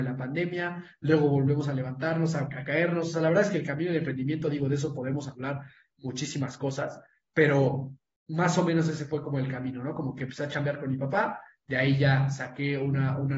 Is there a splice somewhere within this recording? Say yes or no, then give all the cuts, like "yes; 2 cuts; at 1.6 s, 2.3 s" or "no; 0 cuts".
no; 0 cuts